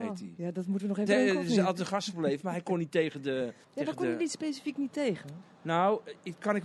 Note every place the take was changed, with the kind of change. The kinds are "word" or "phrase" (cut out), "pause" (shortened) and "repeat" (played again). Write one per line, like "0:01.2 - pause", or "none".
0:01.1 - word
0:01.9 - word
0:03.6 - pause